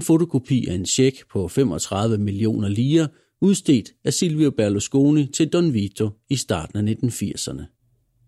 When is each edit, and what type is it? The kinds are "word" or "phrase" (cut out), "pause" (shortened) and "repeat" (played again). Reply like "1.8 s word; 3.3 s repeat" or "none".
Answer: none